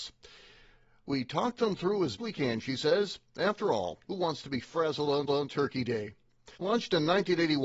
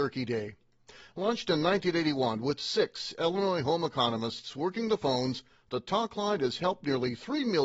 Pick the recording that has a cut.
first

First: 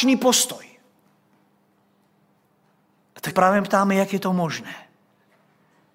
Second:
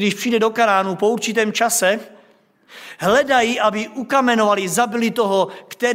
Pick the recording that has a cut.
first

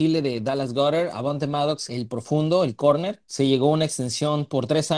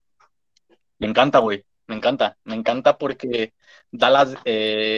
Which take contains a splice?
first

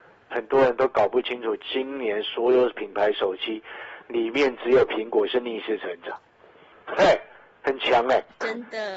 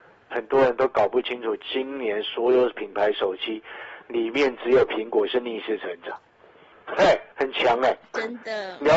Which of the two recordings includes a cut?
second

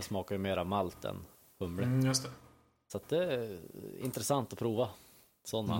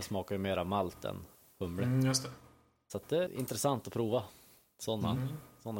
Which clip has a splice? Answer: second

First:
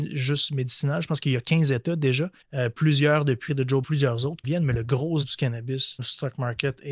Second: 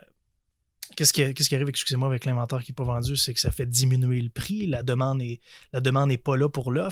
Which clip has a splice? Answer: first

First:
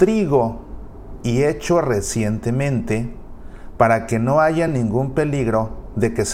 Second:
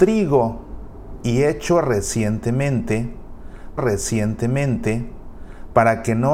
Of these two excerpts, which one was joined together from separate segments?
second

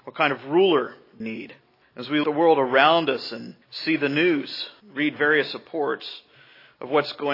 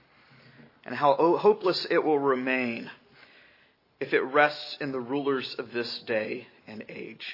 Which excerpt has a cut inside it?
first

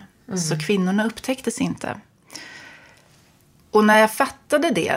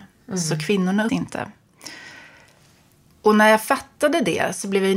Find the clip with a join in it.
second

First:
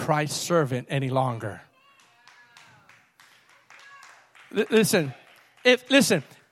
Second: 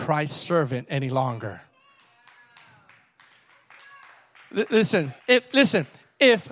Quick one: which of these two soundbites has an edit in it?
second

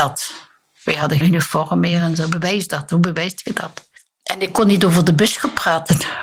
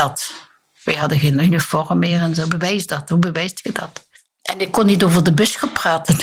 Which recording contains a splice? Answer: first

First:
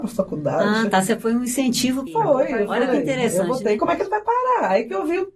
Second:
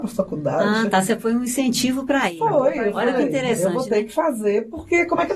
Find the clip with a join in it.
first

